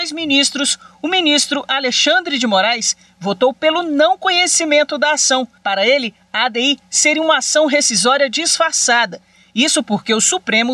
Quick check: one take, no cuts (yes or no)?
no